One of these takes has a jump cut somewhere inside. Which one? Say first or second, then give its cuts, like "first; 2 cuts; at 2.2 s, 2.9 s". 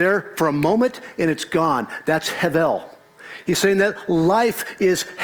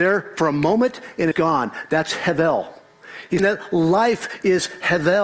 second; 2 cuts; at 1.3 s, 3.4 s